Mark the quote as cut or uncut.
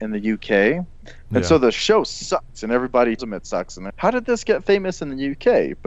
cut